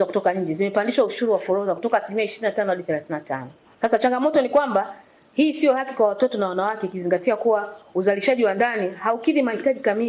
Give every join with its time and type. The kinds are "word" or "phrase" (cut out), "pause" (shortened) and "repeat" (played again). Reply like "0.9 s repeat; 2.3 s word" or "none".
none